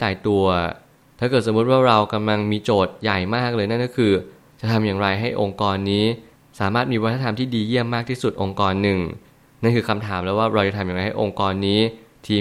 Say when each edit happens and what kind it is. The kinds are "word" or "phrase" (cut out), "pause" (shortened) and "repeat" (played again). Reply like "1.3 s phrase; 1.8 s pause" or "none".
none

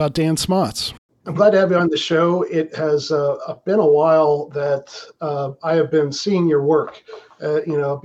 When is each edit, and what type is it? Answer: none

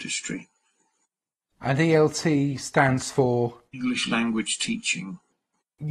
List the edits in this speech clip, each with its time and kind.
3.7 s pause

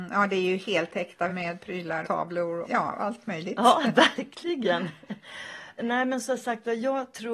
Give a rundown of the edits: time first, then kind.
1.3 s word; 2.0 s word; 2.6 s word; 5.8 s word

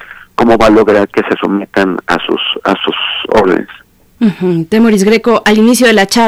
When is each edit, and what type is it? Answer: none

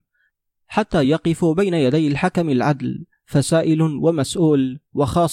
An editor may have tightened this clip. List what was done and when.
none

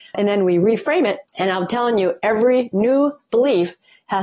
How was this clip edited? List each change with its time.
1.3 s pause

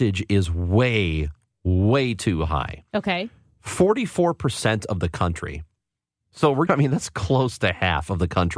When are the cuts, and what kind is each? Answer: 6.7 s word

